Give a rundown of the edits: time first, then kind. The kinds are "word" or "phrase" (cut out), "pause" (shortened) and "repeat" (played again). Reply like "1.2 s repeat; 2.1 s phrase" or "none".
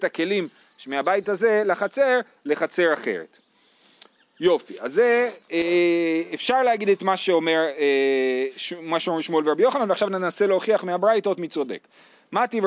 none